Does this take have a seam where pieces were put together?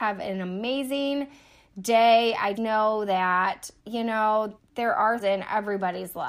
yes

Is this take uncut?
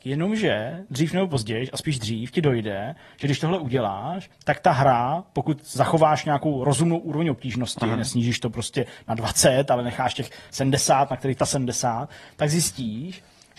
no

